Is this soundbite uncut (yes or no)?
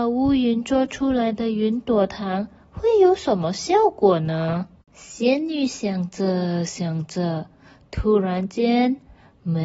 yes